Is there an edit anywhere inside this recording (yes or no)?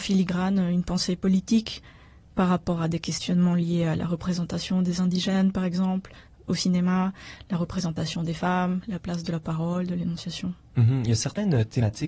no